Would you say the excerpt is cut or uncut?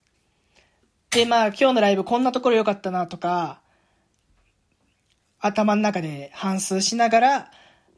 uncut